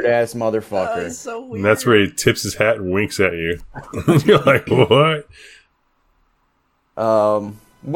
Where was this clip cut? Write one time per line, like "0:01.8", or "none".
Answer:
none